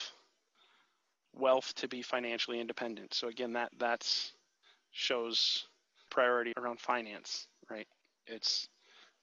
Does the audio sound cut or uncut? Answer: cut